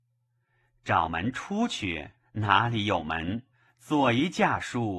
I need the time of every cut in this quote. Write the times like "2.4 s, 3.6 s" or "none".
2.2 s, 3.5 s